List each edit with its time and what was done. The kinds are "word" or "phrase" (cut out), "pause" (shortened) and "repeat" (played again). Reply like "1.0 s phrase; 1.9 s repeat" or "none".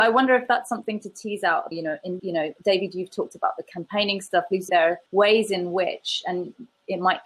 1.7 s phrase; 2.2 s phrase; 4.7 s word; 5.1 s pause